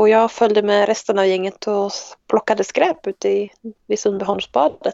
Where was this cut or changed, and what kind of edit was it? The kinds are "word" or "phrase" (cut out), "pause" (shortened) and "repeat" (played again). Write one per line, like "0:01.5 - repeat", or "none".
0:02.2 - pause
0:03.8 - pause